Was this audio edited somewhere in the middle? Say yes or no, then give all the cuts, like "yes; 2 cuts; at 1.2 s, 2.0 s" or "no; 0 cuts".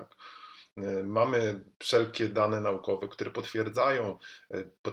no; 0 cuts